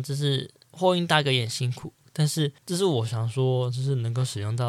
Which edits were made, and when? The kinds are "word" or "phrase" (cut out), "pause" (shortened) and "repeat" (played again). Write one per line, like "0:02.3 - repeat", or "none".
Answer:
0:02.6 - pause